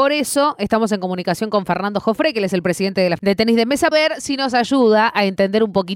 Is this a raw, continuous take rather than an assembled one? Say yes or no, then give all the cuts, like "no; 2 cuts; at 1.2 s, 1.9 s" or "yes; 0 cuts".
no; 2 cuts; at 3.2 s, 3.9 s